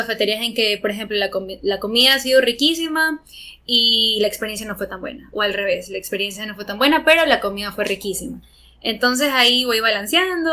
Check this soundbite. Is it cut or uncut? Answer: uncut